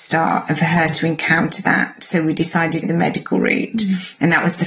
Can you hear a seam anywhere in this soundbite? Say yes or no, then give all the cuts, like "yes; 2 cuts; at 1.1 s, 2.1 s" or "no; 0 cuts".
yes; 1 cut; at 2.8 s